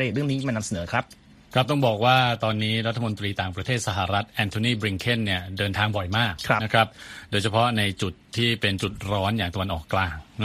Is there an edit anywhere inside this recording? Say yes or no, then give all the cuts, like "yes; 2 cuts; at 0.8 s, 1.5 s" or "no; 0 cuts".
no; 0 cuts